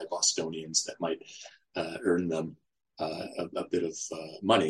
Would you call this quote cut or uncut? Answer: uncut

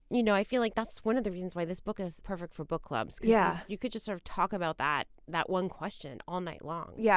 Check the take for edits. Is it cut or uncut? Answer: cut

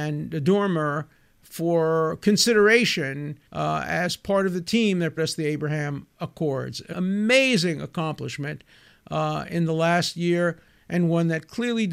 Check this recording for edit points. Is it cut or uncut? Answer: cut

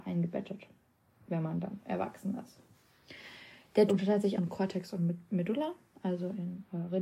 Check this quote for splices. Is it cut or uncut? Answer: cut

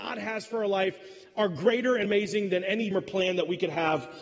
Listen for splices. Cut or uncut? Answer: cut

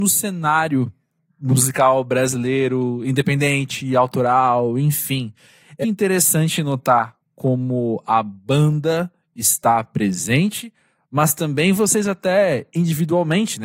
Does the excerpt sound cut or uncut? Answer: cut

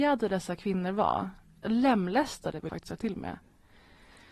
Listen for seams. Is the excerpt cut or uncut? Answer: cut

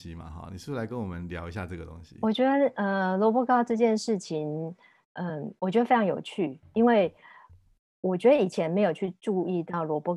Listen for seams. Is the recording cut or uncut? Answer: uncut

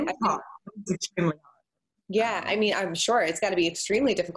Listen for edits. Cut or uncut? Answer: uncut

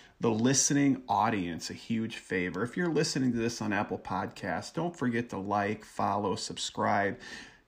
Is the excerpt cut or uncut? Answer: uncut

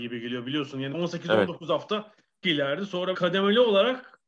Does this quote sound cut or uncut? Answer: cut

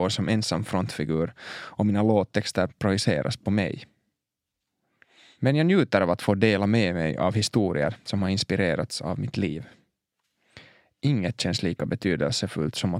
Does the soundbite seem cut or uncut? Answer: uncut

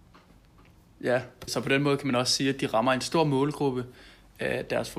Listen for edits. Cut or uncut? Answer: cut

